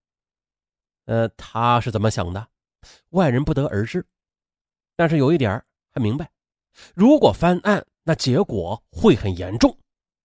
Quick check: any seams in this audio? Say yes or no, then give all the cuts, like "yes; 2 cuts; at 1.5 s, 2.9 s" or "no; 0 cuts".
no; 0 cuts